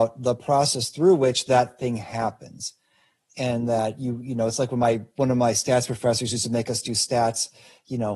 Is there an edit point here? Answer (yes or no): no